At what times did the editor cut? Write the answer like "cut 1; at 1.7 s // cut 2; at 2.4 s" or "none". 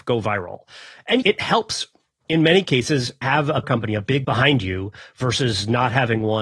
cut 1; at 1.2 s // cut 2; at 3.2 s // cut 3; at 3.6 s // cut 4; at 4.2 s